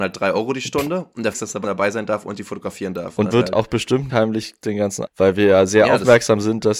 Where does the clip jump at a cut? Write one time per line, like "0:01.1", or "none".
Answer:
0:01.3
0:01.6
0:03.3
0:04.1
0:05.1